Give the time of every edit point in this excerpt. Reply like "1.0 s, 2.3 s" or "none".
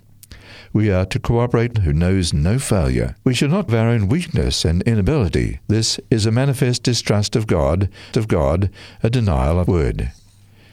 1.7 s, 3.2 s, 3.7 s, 5.6 s, 8.1 s, 9.7 s